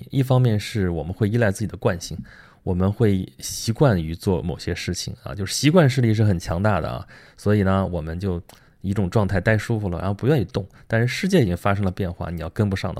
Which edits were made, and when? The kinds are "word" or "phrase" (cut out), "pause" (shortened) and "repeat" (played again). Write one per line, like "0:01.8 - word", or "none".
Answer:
none